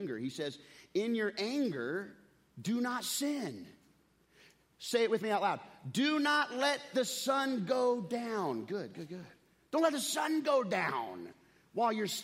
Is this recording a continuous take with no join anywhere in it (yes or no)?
yes